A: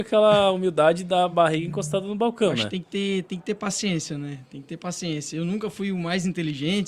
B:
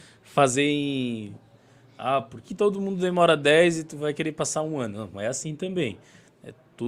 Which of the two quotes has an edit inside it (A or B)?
B